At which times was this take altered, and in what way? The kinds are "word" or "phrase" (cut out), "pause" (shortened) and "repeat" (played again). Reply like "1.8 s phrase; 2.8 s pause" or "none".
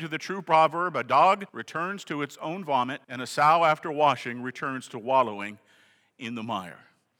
1.5 s pause; 3.0 s pause